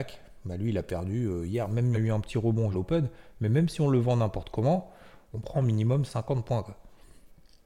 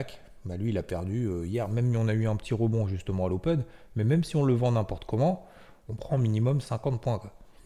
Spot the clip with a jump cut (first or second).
first